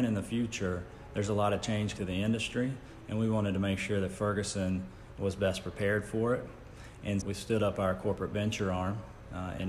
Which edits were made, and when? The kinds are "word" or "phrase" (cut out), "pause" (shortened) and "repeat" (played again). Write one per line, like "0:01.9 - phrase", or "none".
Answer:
0:02.0 - word
0:07.2 - word